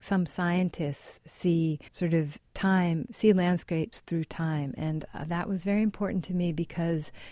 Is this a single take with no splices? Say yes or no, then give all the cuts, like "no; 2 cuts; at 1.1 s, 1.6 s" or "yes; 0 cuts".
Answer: no; 1 cut; at 1.9 s